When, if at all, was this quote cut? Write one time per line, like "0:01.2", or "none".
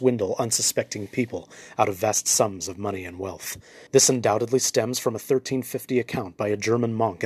0:03.9